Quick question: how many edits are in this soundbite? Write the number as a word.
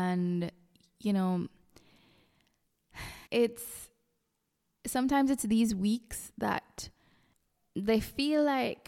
one